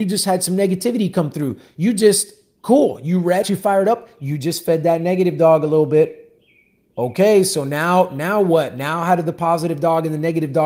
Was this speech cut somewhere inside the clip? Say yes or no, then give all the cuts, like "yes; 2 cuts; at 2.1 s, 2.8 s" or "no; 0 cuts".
yes; 1 cut; at 3.4 s